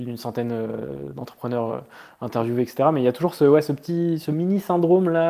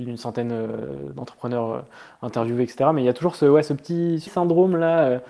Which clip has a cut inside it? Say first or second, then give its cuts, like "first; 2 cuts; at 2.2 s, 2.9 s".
second; 1 cut; at 4.3 s